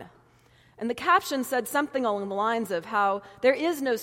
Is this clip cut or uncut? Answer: uncut